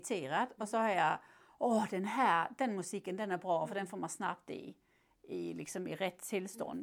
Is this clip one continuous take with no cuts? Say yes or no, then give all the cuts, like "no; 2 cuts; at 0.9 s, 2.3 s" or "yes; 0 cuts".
yes; 0 cuts